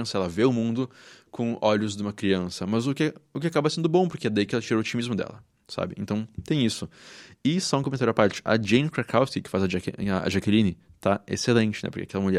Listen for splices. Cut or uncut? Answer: uncut